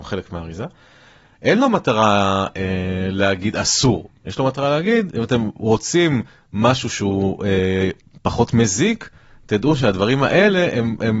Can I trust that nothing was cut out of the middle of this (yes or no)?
yes